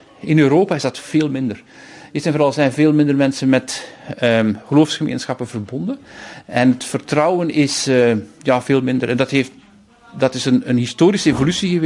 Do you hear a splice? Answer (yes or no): no